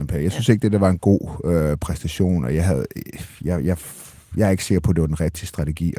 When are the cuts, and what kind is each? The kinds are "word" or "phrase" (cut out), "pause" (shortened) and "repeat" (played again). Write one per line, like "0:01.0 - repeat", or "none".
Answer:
0:03.4 - pause